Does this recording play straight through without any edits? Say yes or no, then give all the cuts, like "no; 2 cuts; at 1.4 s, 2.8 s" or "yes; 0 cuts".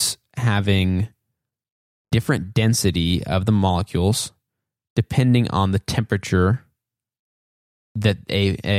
yes; 0 cuts